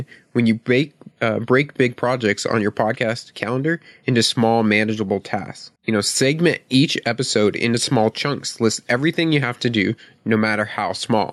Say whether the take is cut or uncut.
cut